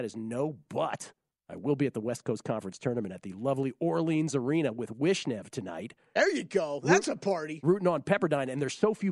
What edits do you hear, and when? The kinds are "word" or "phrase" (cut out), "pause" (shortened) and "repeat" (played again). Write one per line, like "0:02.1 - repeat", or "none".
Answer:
none